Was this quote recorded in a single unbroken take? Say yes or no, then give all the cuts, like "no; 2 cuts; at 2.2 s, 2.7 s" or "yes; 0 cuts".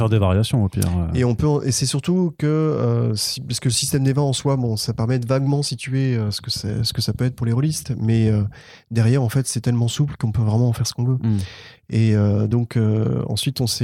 yes; 0 cuts